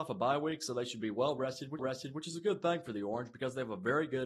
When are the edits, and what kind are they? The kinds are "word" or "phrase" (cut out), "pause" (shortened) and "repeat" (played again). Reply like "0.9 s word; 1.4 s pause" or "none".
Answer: 1.8 s repeat